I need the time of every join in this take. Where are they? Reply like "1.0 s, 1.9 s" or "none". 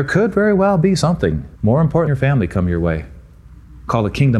1.5 s, 2.1 s